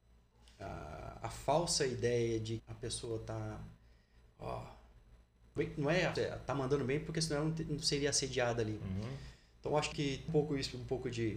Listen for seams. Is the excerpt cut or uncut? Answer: cut